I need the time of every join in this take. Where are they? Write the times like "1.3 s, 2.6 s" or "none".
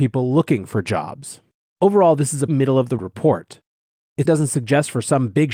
2.5 s, 3.0 s, 4.2 s